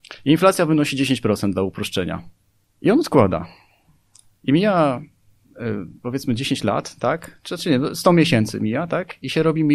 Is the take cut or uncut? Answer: cut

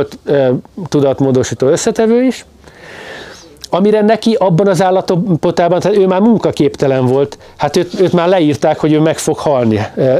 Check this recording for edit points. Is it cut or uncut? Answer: uncut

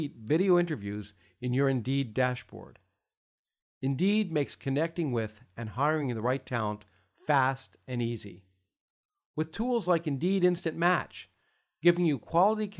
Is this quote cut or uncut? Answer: uncut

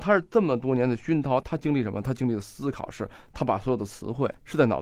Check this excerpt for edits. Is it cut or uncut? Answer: uncut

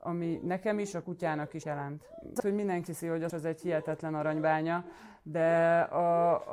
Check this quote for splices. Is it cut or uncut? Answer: cut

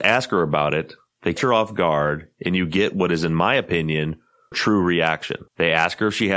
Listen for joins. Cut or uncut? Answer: cut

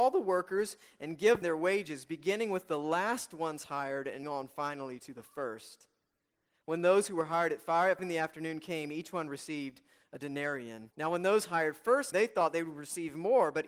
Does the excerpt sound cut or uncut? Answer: cut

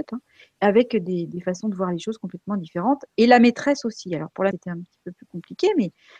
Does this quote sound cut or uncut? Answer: cut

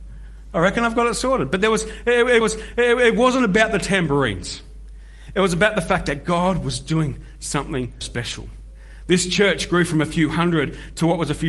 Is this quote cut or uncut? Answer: cut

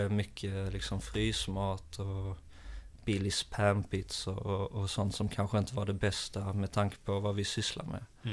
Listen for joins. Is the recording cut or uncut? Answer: uncut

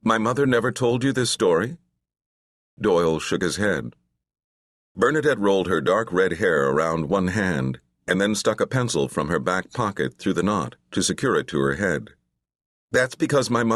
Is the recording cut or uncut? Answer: uncut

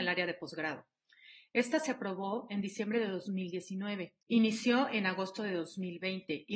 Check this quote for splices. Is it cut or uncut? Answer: cut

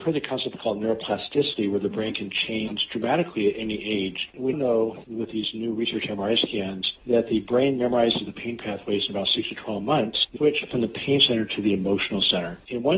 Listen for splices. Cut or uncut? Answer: cut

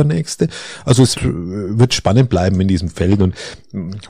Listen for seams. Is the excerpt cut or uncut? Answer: cut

